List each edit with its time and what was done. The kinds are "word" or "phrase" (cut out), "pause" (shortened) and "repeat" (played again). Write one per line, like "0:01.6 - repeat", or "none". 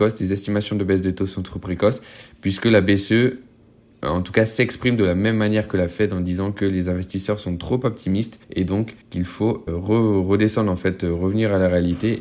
0:08.4 - pause
0:09.0 - pause
0:09.7 - word